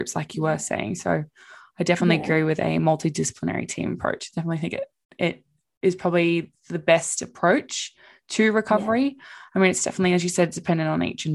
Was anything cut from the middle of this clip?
no; 0 cuts

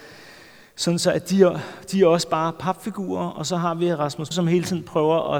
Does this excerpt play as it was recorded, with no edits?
no; 1 cut; at 4.3 s

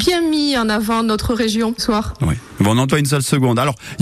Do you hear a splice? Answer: yes; 2 cuts; at 1.8 s, 2.9 s

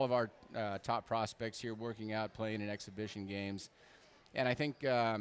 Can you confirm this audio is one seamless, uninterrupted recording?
yes; 0 cuts

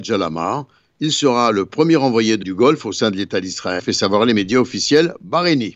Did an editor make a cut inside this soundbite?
yes; 2 cuts; at 2.4 s, 3.8 s

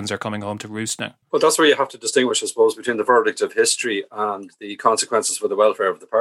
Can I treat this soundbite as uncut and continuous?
no; 1 cut; at 1.2 s

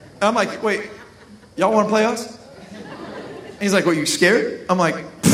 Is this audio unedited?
yes; 0 cuts

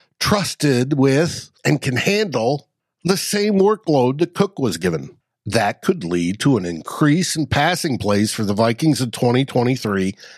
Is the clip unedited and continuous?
no; 3 cuts; at 1.6 s, 2.8 s, 5.2 s

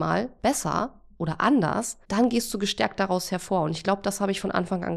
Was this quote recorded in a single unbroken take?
no; 1 cut; at 2.0 s

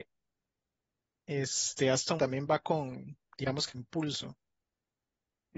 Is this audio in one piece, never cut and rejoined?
no; 3 cuts; at 2.2 s, 3.2 s, 3.7 s

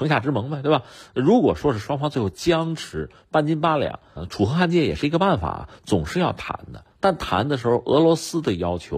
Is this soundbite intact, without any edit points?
no; 2 cuts; at 4.2 s, 6.9 s

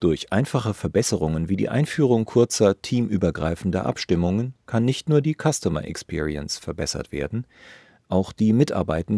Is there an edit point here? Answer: no; 0 cuts

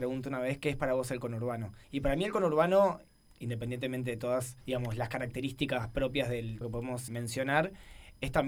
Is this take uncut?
no; 4 cuts; at 1.8 s, 4.6 s, 6.6 s, 7.1 s

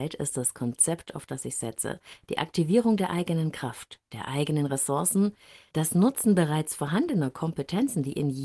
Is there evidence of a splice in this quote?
no; 0 cuts

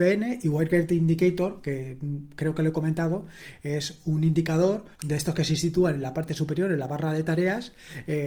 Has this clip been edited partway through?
yes; 1 cut; at 4.9 s

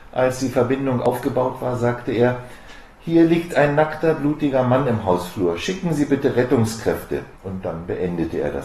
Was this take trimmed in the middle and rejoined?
yes; 1 cut; at 7.4 s

